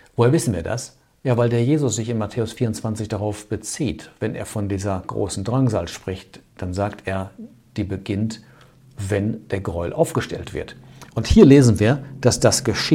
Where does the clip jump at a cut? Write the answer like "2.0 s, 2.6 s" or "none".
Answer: none